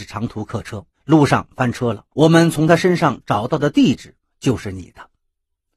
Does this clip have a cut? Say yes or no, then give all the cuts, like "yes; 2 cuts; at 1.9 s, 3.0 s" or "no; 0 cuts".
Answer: yes; 2 cuts; at 0.9 s, 2.1 s